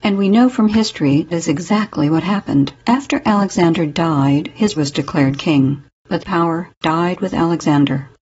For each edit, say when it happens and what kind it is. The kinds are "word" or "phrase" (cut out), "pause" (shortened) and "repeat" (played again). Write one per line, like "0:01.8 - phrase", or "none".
0:01.3 - word
0:02.8 - pause
0:04.8 - word
0:06.2 - phrase